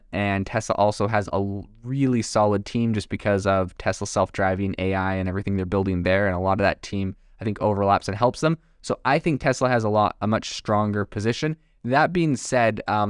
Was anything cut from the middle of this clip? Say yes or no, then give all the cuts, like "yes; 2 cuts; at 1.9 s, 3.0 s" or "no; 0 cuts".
no; 0 cuts